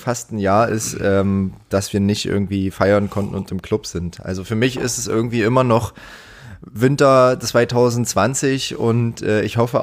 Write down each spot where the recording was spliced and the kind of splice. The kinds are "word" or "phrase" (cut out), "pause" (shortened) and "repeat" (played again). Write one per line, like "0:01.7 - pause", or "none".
none